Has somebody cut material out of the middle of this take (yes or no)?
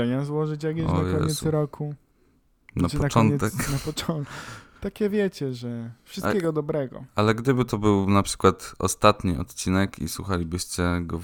no